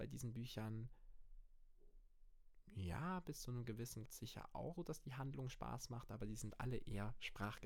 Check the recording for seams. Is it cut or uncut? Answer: cut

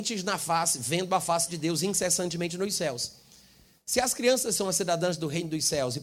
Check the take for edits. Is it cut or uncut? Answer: uncut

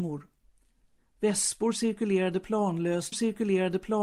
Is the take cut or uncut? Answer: cut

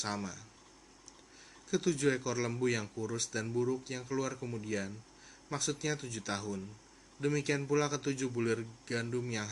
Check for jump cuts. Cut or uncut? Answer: uncut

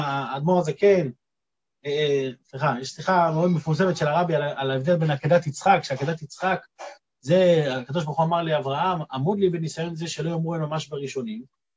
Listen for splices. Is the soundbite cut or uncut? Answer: uncut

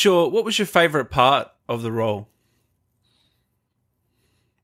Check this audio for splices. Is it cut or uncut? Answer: uncut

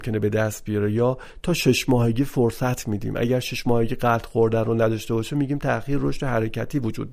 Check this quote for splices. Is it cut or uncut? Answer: uncut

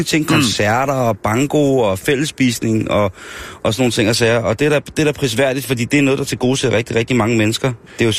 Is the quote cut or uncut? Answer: uncut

